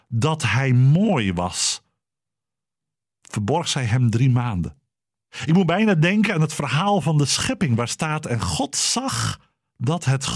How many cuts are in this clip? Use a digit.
0